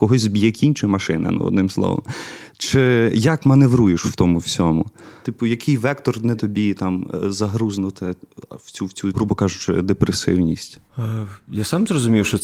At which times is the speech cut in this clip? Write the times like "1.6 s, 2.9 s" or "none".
6.4 s, 9.1 s